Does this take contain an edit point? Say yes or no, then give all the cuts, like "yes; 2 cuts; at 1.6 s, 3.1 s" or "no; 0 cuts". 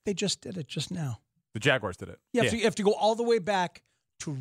no; 0 cuts